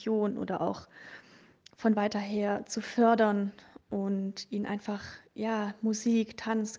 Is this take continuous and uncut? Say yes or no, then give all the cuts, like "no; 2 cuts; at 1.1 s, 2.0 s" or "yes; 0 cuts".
yes; 0 cuts